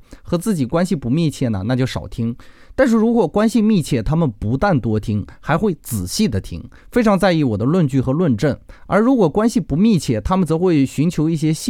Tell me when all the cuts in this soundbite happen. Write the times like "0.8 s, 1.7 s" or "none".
6.8 s